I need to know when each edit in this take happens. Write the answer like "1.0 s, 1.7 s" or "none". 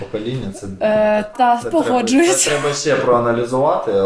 1.3 s